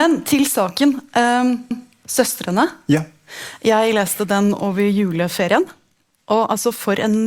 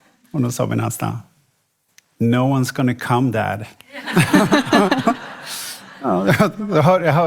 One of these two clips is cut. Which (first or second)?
first